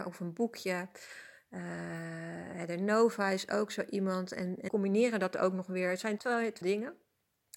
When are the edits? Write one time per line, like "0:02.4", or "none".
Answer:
0:04.7
0:06.2
0:06.6